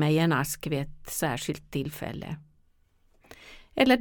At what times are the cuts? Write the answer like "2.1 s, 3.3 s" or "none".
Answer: none